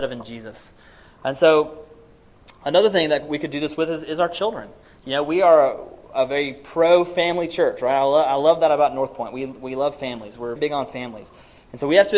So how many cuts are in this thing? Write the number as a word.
one